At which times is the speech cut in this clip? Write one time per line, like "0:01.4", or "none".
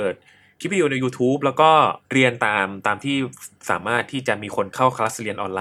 0:02.0